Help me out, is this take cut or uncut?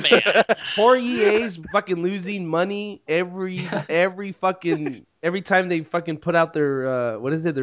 cut